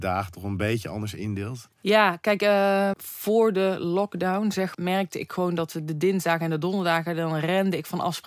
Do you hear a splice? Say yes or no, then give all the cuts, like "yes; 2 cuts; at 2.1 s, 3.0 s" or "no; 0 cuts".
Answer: yes; 3 cuts; at 1.7 s, 2.9 s, 4.7 s